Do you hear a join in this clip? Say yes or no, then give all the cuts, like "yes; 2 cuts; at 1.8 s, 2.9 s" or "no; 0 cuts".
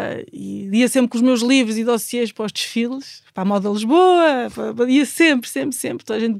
no; 0 cuts